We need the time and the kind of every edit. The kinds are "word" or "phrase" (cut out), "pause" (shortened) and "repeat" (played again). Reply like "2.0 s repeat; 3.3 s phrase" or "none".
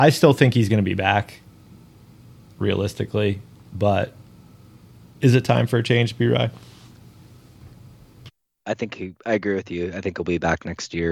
none

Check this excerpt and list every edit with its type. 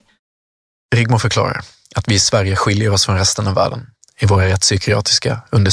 none

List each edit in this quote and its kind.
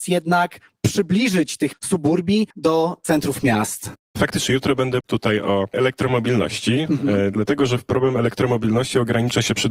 1.7 s word; 2.5 s pause; 5.0 s word; 5.7 s phrase; 7.9 s word

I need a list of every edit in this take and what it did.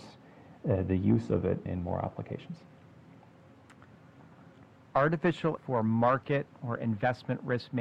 1.7 s word; 5.6 s word

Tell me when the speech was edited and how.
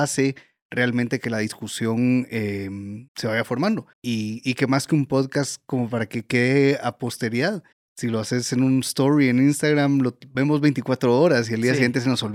3.1 s pause; 3.9 s pause; 7.7 s pause

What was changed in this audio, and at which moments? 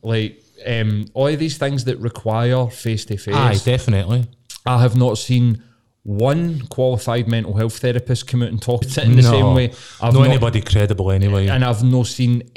8.8 s word

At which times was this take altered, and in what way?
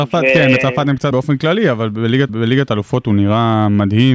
1.1 s word; 2.3 s repeat

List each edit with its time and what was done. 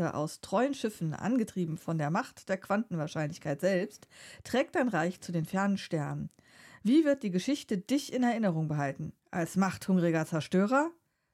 9.2 s pause

